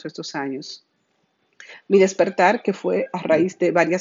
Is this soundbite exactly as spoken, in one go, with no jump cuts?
yes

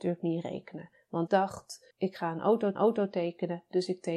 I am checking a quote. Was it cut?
yes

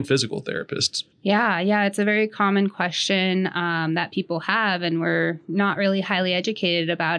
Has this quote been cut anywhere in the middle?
yes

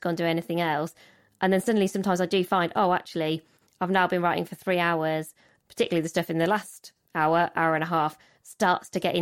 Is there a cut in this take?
no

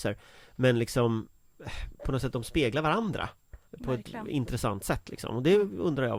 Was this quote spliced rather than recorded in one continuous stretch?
yes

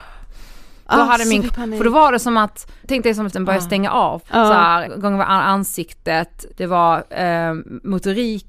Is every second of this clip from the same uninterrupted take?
no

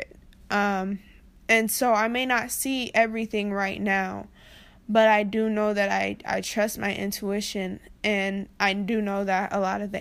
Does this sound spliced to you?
no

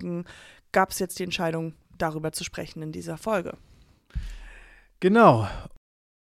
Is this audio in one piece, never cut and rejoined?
yes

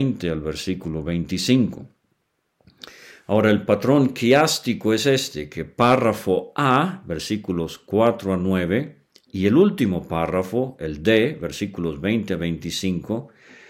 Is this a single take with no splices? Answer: yes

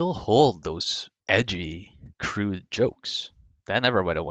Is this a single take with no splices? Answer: no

